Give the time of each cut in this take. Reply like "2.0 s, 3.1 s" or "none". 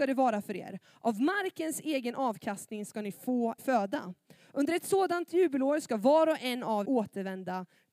3.6 s, 6.8 s